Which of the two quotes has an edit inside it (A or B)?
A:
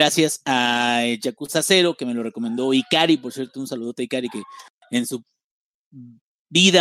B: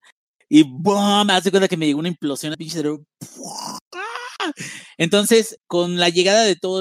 B